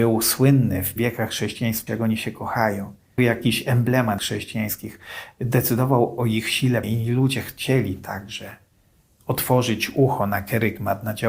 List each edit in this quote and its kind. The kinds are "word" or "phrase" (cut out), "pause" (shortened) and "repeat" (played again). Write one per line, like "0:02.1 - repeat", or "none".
0:01.0 - word
0:01.9 - word
0:03.2 - word
0:04.2 - phrase
0:06.8 - word